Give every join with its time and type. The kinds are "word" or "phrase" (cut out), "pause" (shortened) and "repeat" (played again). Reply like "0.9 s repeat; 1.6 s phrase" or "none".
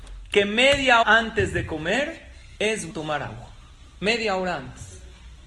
1.0 s word; 2.9 s word